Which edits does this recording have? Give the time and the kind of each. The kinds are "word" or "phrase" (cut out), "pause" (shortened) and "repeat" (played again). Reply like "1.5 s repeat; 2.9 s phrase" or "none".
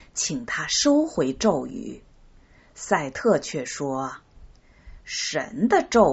none

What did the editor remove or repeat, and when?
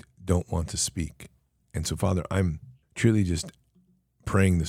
1.6 s pause; 2.8 s pause

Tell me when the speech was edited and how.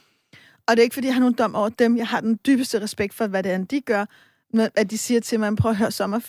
none

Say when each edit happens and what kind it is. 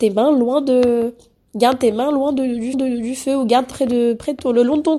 2.7 s repeat; 3.7 s word

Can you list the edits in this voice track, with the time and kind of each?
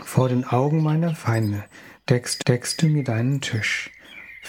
2.4 s repeat

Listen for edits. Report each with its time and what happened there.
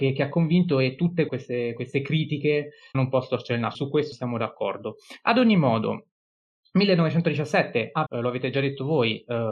1.3 s word; 2.9 s word; 3.7 s word; 4.1 s word; 8.1 s word

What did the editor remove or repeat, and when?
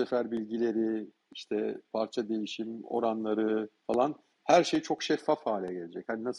3.8 s pause

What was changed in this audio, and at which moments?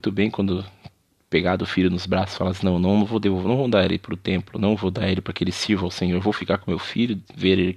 none

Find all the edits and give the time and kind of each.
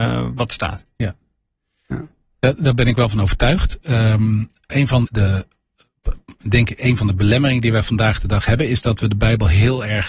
4.7 s word; 5.0 s word

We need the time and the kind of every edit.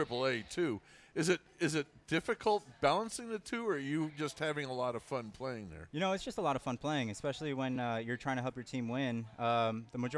none

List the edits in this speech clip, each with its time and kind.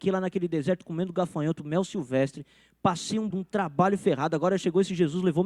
3.3 s word

